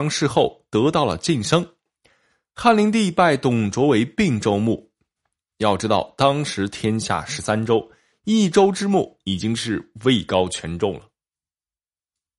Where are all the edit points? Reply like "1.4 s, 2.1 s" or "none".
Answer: none